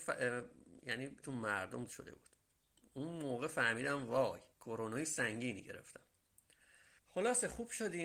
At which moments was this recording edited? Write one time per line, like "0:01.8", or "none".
0:01.2
0:01.9
0:04.5
0:07.0